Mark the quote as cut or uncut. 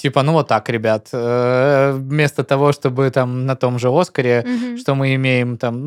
uncut